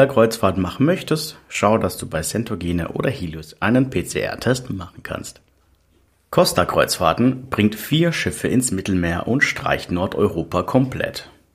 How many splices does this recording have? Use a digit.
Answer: 0